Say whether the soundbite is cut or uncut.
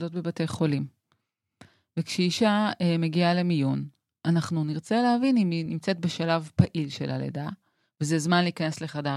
uncut